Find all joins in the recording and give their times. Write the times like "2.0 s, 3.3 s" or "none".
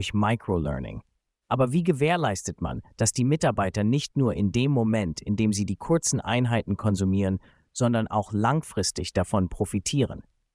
none